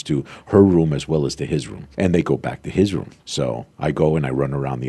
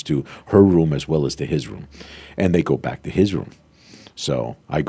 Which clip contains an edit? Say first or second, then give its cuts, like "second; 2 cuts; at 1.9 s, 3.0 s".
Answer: first; 2 cuts; at 1.9 s, 3.2 s